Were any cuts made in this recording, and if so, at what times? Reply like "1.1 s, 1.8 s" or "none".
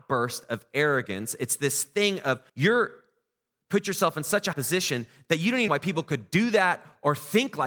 2.5 s, 4.5 s, 5.7 s